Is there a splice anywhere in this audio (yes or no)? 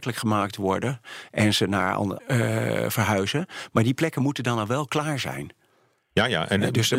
yes